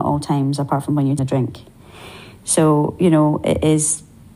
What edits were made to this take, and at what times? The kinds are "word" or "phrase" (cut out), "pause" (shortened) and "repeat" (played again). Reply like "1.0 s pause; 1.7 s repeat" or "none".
1.2 s word